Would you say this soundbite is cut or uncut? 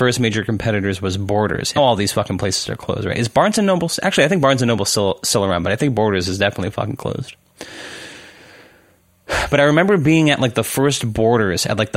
cut